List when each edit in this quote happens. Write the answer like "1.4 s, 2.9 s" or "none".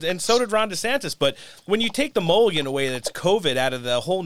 1.6 s